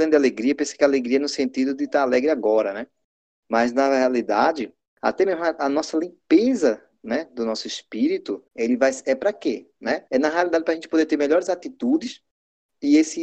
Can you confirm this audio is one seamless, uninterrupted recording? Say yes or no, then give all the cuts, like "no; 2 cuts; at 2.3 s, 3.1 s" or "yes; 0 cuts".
no; 2 cuts; at 8.5 s, 10.1 s